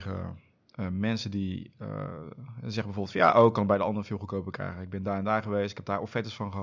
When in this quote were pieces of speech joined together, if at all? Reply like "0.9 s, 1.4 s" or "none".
none